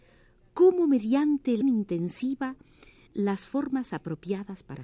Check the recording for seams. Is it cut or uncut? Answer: cut